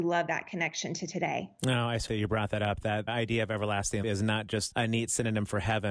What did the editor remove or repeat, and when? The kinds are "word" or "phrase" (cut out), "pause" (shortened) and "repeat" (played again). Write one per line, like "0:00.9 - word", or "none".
0:02.1 - word
0:03.1 - word
0:04.0 - word
0:04.7 - word